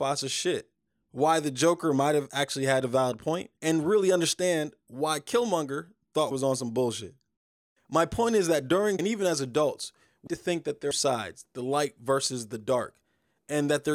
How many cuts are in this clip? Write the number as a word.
five